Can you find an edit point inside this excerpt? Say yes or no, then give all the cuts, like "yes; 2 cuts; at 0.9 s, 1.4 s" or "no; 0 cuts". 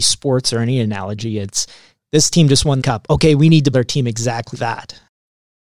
yes; 3 cuts; at 2.8 s, 3.7 s, 4.5 s